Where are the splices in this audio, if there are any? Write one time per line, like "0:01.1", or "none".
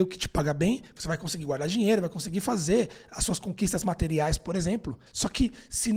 0:05.1